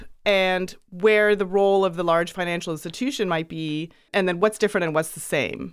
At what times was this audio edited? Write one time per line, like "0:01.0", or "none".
none